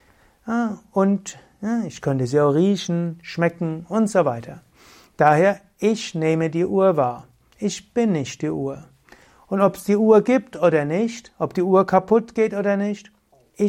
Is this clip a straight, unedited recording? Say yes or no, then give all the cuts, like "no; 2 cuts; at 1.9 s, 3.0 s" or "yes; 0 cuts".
yes; 0 cuts